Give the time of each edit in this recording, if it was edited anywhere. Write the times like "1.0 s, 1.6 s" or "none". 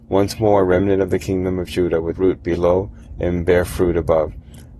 2.1 s